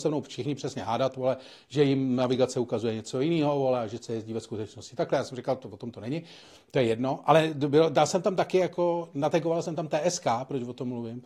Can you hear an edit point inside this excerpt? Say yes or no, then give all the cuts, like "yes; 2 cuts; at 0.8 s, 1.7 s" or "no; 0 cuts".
no; 0 cuts